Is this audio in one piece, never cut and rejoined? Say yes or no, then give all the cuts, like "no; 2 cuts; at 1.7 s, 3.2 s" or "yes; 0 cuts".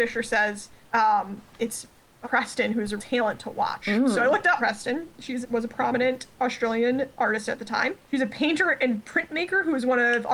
no; 4 cuts; at 2.2 s, 3.0 s, 4.6 s, 5.4 s